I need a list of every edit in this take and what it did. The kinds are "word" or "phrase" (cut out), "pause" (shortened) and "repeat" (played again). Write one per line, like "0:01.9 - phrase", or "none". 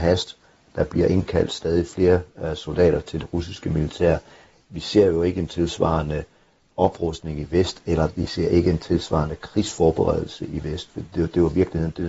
none

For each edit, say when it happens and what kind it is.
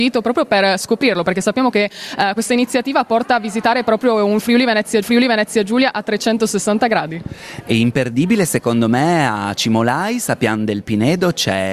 0:02.4 - word
0:05.0 - repeat

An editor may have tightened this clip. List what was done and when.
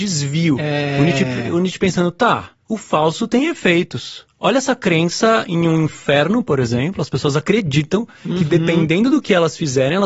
0:02.6 - pause

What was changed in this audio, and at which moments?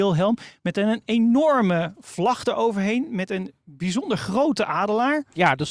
none

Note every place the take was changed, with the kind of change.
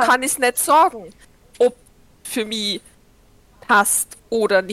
0:02.2 - word

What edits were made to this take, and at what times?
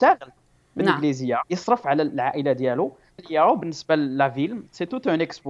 0:01.4 - word
0:03.2 - word

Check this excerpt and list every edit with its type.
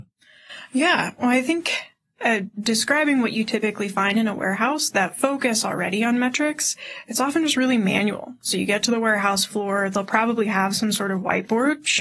none

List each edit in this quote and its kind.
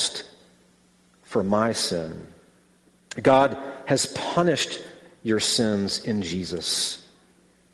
none

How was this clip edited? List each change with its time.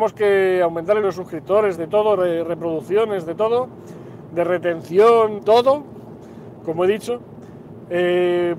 0:01.0 - word
0:01.8 - phrase
0:05.4 - word

